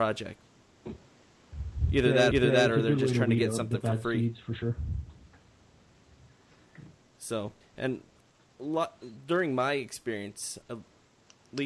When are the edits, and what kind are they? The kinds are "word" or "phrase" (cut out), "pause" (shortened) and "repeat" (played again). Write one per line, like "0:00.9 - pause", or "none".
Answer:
0:02.3 - repeat
0:07.6 - pause
0:10.6 - word